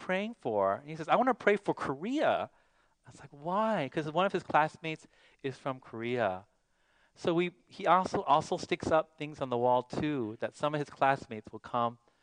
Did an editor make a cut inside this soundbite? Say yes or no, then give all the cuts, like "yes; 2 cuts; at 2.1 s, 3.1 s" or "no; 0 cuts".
no; 0 cuts